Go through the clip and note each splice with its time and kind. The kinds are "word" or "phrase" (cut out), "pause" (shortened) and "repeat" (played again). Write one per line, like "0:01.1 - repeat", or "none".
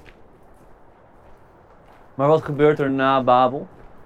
none

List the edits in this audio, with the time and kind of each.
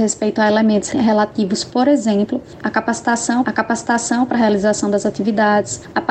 0:02.6 - word
0:03.4 - repeat

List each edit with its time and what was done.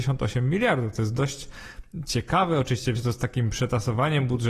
0:03.0 - word

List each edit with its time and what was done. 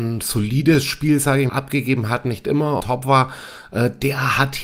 0:01.5 - word
0:02.8 - word

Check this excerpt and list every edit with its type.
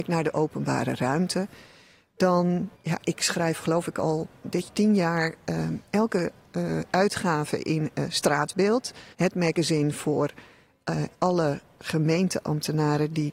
0:02.7 - pause
0:04.7 - word
0:09.1 - pause
0:11.1 - pause

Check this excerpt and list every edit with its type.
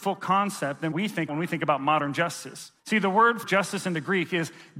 0:00.9 - word
0:01.3 - word
0:02.8 - pause
0:03.4 - word

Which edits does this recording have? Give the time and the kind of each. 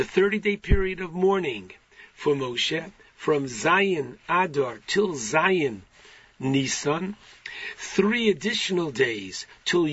none

